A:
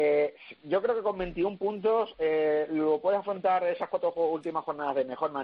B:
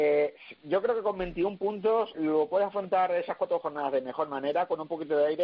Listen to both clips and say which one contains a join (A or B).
B